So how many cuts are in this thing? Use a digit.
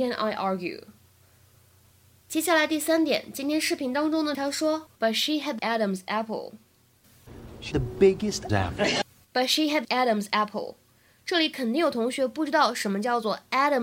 6